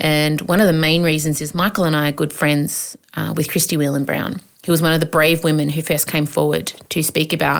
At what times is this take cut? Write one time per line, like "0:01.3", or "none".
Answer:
none